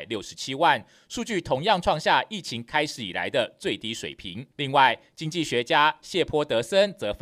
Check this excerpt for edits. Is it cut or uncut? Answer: cut